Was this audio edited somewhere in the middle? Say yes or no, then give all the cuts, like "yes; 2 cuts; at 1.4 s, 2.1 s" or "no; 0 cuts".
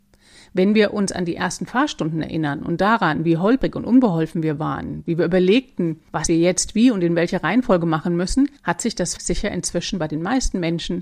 yes; 2 cuts; at 8.6 s, 9.2 s